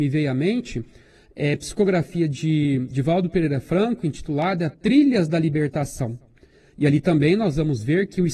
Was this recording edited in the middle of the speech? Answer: no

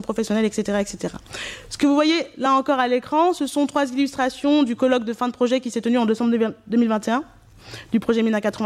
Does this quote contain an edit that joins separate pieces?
no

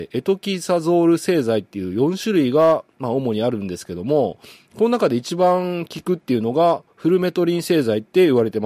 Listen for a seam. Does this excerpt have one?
no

